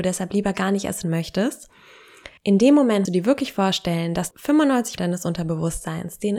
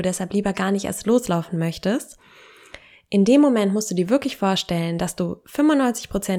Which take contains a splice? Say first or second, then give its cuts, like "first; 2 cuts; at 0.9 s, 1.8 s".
first; 5 cuts; at 1.0 s, 2.4 s, 3.0 s, 4.3 s, 5.0 s